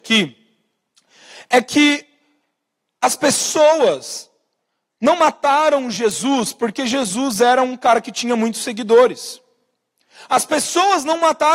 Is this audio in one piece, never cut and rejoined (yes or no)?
yes